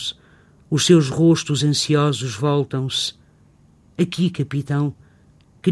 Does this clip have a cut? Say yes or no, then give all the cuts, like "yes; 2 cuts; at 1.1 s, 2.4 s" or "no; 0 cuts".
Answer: no; 0 cuts